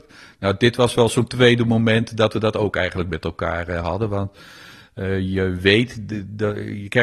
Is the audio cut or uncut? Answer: uncut